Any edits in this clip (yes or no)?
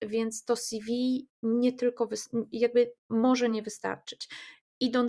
no